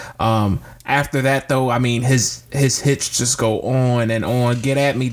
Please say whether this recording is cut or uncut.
uncut